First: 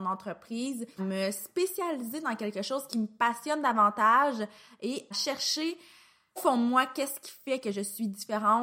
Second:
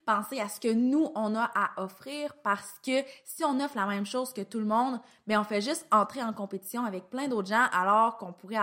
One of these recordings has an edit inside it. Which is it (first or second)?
first